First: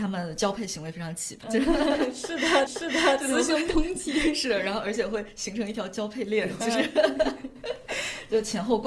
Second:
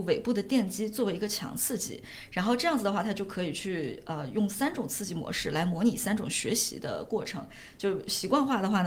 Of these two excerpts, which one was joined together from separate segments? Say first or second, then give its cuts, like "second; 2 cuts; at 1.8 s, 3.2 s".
first; 2 cuts; at 1.4 s, 2.7 s